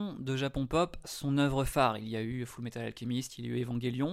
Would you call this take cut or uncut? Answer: cut